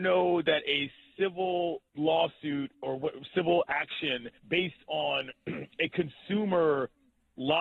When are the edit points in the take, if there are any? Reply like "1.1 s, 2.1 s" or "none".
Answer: 1.9 s, 4.4 s